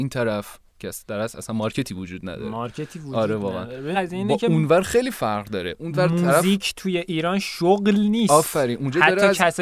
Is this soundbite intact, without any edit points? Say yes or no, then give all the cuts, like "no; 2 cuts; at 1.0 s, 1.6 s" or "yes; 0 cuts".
no; 1 cut; at 3.9 s